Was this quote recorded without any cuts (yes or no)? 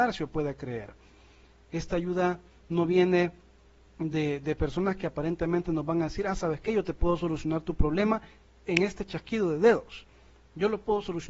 yes